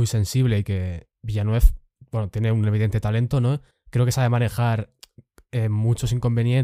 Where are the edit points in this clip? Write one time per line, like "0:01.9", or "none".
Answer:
0:03.7